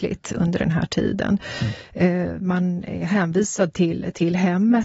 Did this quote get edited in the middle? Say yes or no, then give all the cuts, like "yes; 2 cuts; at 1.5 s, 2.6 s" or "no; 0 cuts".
no; 0 cuts